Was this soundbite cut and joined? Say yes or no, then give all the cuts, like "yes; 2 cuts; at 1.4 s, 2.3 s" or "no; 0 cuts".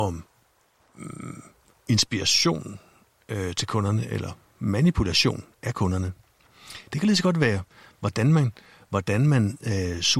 no; 0 cuts